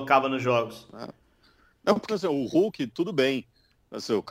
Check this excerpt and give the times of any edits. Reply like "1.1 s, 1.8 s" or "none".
2.1 s